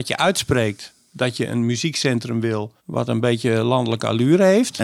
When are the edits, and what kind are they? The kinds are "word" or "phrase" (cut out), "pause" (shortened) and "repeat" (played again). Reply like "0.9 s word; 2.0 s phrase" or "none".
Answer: 2.8 s pause